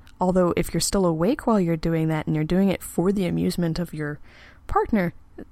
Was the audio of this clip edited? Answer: no; 0 cuts

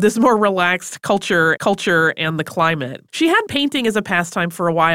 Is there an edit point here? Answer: yes; 3 cuts; at 1.6 s, 3.1 s, 3.5 s

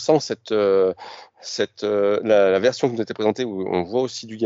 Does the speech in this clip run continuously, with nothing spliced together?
yes; 0 cuts

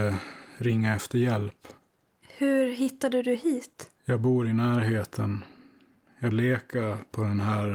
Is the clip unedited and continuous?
no; 2 cuts; at 4.0 s, 6.3 s

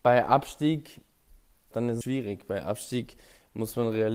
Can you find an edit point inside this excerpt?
yes; 2 cuts; at 1.7 s, 2.0 s

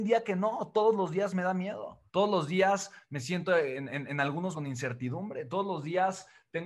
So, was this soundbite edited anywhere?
yes; 2 cuts; at 2.1 s, 4.5 s

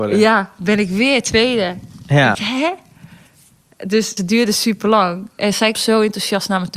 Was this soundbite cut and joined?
yes; 3 cuts; at 2.3 s, 4.2 s, 5.7 s

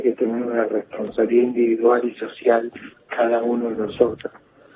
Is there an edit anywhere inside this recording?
no; 0 cuts

